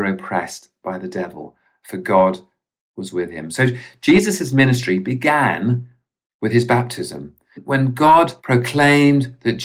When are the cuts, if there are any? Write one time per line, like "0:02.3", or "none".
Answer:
0:08.4